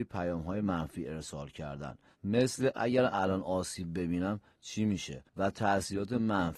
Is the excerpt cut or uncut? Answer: cut